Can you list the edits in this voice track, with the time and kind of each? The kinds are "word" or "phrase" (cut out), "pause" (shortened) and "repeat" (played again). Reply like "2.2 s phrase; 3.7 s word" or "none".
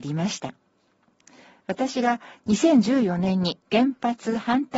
3.6 s pause

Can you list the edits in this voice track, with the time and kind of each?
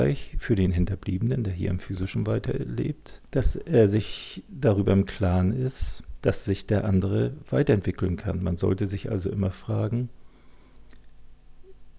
3.3 s pause

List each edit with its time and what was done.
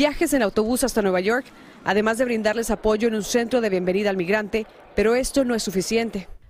none

